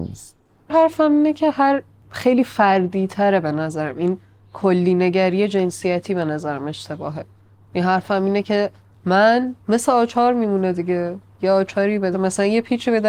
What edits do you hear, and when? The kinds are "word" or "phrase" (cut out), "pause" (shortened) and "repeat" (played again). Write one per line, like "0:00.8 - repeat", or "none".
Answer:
0:09.6 - pause
0:12.1 - word